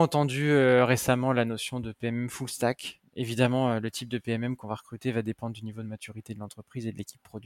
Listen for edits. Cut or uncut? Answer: uncut